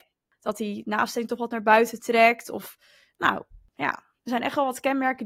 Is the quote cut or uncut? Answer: uncut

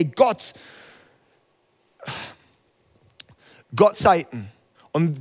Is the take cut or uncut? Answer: cut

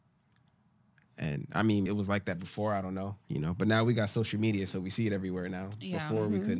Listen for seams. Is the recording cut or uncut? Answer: cut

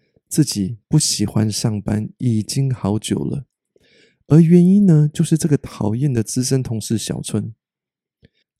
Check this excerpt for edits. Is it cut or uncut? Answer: uncut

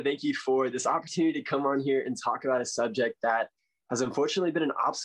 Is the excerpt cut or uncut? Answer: uncut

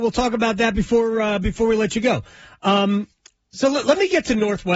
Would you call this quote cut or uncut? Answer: uncut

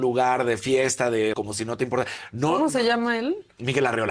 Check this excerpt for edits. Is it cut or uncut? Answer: cut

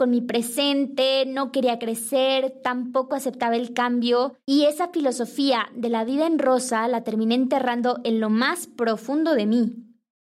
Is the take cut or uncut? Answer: cut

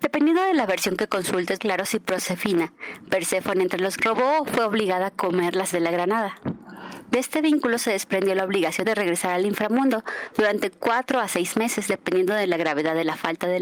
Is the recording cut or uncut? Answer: cut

